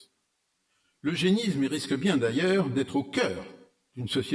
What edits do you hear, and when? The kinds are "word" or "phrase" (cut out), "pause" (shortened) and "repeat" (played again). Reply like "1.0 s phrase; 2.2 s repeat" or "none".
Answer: none